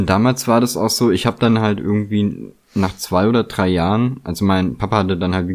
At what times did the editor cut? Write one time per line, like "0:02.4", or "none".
none